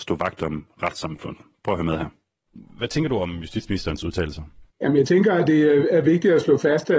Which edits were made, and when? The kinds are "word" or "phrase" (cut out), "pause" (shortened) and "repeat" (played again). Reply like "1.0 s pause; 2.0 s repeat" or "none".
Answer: 4.7 s pause